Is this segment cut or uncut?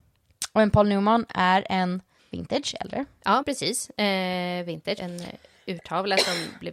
cut